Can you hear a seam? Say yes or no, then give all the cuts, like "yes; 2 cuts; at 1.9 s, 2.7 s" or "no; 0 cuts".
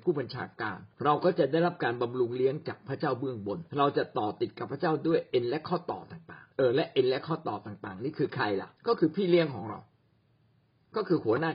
yes; 4 cuts; at 0.9 s, 3.7 s, 6.5 s, 8.8 s